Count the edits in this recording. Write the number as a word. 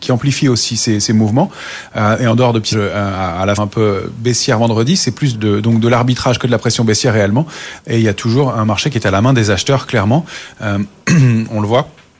three